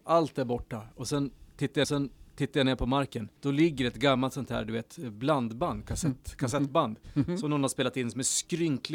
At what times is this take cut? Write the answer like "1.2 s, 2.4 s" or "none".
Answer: 1.8 s, 3.4 s